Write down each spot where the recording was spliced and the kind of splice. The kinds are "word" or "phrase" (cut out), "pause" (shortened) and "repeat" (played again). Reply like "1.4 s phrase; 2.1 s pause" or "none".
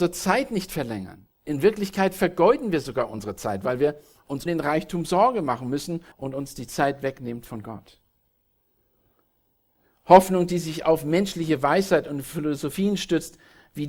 1.3 s pause; 4.5 s word; 6.1 s pause